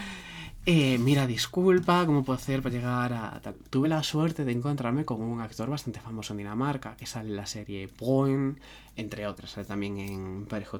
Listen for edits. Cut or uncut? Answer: uncut